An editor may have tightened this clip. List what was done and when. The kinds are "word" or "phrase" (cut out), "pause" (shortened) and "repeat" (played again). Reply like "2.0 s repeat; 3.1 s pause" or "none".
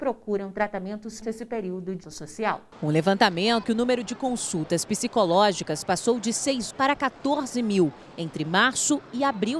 1.2 s phrase; 2.0 s word; 3.6 s word; 6.7 s word